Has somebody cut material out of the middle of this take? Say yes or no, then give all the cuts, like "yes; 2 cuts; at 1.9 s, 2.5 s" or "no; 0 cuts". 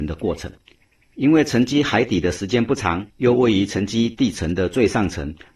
yes; 1 cut; at 3.1 s